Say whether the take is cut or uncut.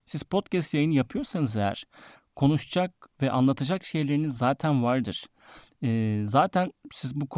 uncut